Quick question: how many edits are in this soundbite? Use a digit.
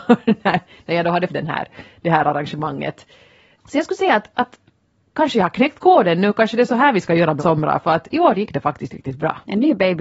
3